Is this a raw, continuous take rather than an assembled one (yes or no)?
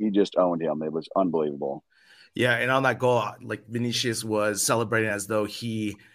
yes